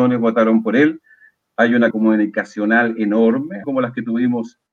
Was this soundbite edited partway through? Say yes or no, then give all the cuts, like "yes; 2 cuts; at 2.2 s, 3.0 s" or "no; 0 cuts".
yes; 2 cuts; at 1.9 s, 3.6 s